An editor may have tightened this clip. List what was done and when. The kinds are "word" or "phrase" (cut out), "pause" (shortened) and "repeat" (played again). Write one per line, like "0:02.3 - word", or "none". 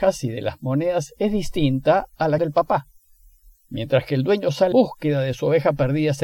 0:02.4 - word
0:04.7 - word